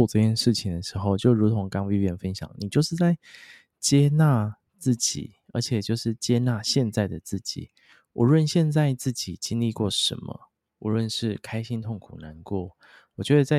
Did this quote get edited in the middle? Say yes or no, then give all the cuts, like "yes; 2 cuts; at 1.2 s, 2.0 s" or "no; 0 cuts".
no; 0 cuts